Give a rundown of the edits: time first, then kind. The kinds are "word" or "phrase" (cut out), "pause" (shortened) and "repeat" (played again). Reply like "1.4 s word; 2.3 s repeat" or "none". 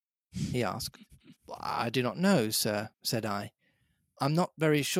1.4 s pause; 2.9 s pause